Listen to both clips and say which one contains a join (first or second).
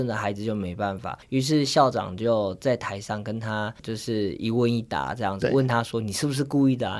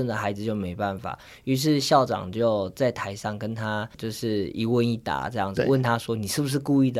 first